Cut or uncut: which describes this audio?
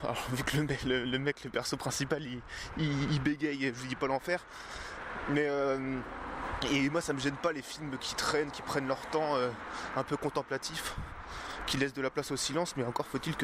uncut